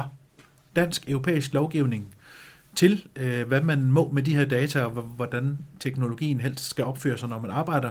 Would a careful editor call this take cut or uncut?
uncut